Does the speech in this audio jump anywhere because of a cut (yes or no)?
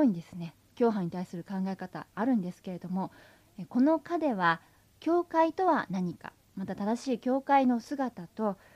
no